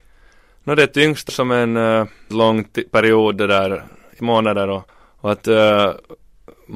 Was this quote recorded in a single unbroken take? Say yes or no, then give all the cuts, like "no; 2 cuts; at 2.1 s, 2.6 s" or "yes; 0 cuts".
no; 4 cuts; at 1.3 s, 2.3 s, 4.2 s, 4.9 s